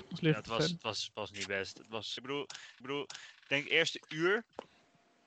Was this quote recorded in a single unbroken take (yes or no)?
no